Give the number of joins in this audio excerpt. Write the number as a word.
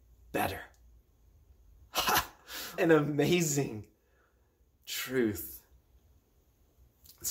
one